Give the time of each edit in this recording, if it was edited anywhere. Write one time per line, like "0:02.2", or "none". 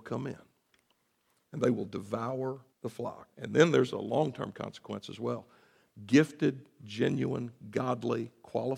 0:02.7
0:03.3